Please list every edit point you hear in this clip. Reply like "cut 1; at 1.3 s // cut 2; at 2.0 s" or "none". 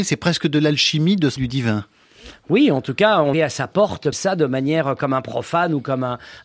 cut 1; at 1.4 s // cut 2; at 3.3 s // cut 3; at 4.1 s

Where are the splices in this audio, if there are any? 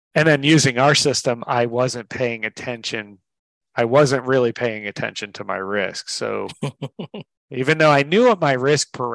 none

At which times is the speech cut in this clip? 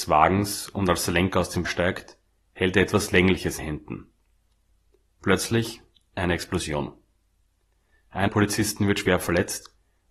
cut 1; at 1.6 s // cut 2; at 3.6 s // cut 3; at 8.3 s

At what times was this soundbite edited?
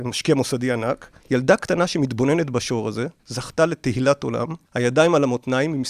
cut 1; at 1.2 s // cut 2; at 3.2 s // cut 3; at 4.7 s

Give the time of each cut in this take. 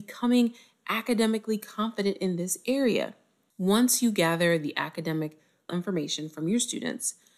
cut 1; at 5.7 s

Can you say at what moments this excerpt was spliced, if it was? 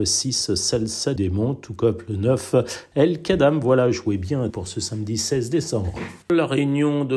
cut 1; at 1.2 s // cut 2; at 4.5 s // cut 3; at 6.2 s

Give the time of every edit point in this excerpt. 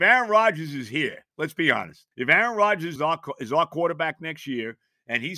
cut 1; at 2.1 s // cut 2; at 3.0 s

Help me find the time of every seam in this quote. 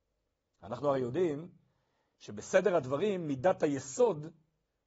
none

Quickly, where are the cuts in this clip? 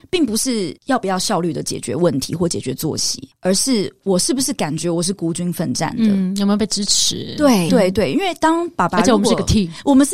cut 1; at 7.7 s

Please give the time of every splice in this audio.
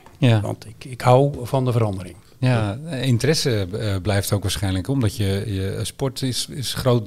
none

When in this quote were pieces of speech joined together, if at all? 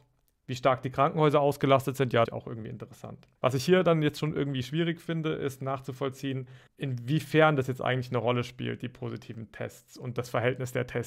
cut 1; at 2.2 s // cut 2; at 3.4 s // cut 3; at 6.7 s

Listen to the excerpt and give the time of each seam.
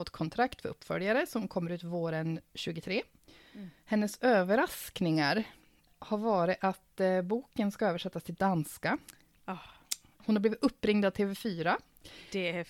none

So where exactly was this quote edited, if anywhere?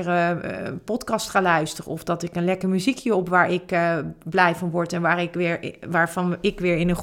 none

